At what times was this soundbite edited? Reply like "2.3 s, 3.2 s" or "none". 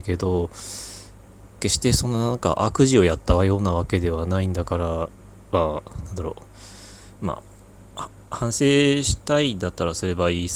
1.5 s